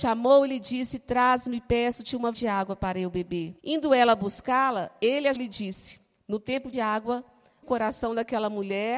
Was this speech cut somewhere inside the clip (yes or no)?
yes